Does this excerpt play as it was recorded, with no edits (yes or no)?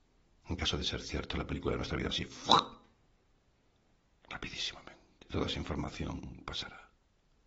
no